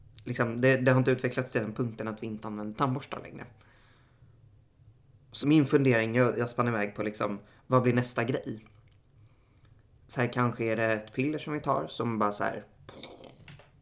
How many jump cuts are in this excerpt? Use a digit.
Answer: 1